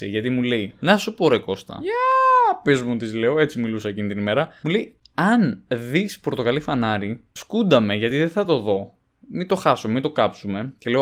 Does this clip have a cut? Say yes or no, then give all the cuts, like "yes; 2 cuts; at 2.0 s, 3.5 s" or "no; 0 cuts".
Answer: no; 0 cuts